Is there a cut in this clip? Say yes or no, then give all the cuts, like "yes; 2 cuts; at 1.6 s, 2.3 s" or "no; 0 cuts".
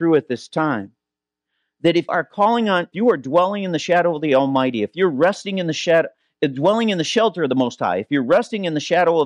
yes; 2 cuts; at 2.1 s, 2.9 s